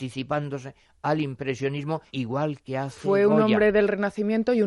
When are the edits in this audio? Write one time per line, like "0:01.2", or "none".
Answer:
0:02.1